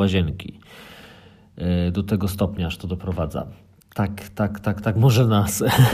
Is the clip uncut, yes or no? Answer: yes